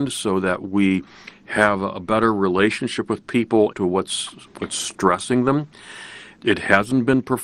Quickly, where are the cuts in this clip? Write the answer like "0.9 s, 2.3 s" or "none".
3.7 s